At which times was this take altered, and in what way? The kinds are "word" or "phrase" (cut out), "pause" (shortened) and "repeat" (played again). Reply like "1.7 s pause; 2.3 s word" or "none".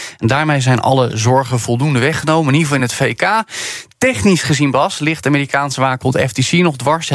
none